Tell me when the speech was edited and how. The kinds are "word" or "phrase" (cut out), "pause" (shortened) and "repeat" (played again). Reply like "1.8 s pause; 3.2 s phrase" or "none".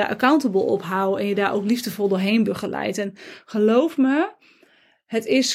none

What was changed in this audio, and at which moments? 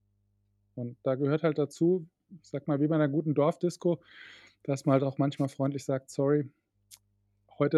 none

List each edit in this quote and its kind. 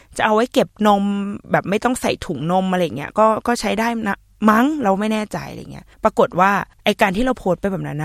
1.4 s pause; 5.9 s pause; 6.7 s pause

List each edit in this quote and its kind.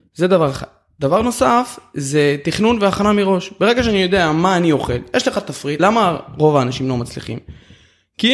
5.8 s word

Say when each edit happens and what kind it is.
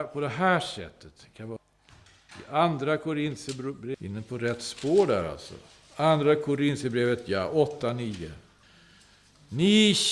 none

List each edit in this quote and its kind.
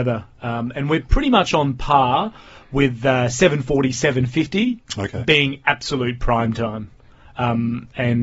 none

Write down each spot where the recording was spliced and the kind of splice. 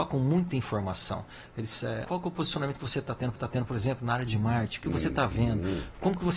2.0 s word; 3.4 s repeat

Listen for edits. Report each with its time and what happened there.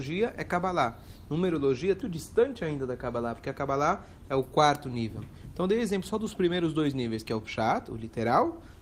2.0 s word

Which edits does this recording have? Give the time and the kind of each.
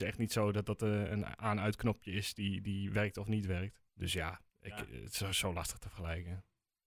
3.9 s pause; 4.5 s pause

